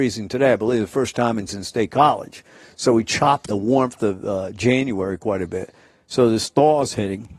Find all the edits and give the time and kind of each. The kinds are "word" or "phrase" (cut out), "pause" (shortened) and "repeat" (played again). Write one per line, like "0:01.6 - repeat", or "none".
0:01.5 - phrase
0:03.5 - phrase